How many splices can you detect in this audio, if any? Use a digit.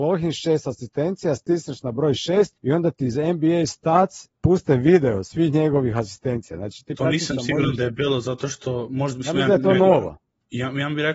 2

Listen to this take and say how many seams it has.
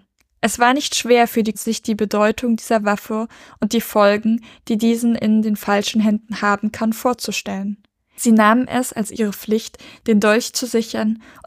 1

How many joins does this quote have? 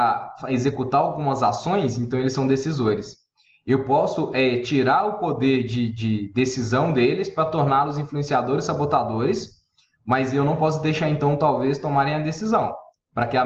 0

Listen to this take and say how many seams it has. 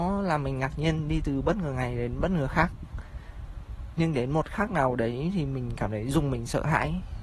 0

